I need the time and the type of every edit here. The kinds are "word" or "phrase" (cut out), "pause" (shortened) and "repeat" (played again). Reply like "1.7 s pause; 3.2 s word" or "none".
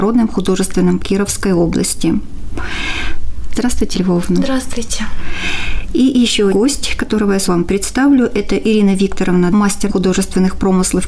1.0 s word; 3.9 s word; 6.5 s word; 7.5 s word; 9.5 s word; 9.9 s word